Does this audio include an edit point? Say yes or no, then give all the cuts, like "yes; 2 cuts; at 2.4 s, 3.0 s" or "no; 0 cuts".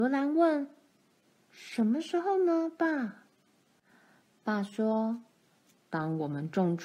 no; 0 cuts